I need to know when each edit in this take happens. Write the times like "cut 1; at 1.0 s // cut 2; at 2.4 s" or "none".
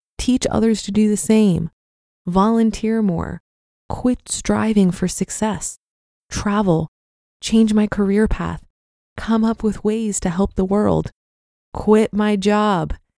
none